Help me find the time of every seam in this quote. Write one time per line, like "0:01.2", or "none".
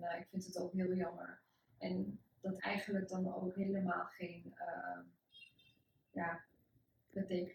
0:02.6